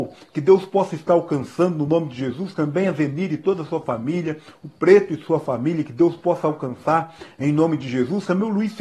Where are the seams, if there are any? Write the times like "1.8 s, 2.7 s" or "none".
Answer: none